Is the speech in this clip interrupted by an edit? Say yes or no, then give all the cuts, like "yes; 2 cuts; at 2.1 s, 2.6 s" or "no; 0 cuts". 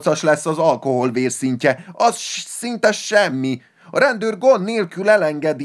no; 0 cuts